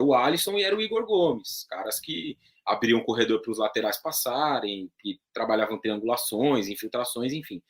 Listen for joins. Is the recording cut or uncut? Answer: uncut